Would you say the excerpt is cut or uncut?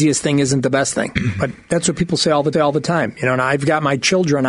cut